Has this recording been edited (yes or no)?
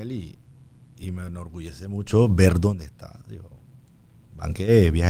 no